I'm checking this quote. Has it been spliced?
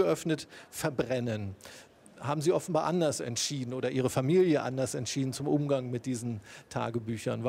no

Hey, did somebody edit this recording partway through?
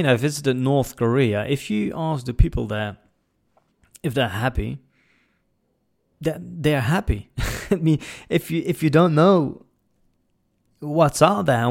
no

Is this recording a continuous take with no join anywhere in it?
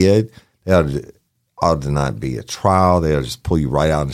yes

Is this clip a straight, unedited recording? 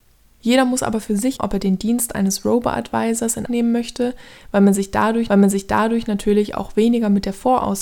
no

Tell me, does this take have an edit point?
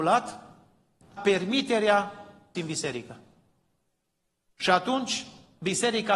yes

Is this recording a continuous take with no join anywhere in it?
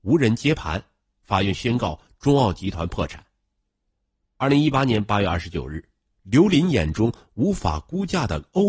yes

